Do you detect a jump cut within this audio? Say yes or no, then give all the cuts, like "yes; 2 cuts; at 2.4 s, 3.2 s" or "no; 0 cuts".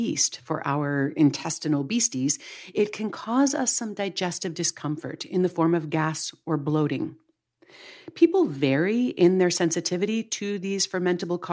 no; 0 cuts